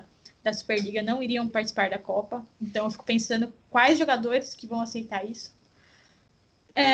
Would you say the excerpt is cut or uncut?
cut